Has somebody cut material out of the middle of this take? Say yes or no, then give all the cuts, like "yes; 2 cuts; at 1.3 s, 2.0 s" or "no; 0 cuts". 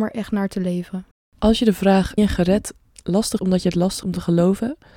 yes; 4 cuts; at 1.1 s, 2.2 s, 3.4 s, 4.0 s